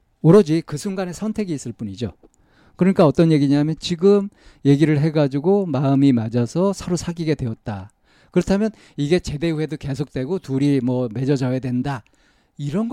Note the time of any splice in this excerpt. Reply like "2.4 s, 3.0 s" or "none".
none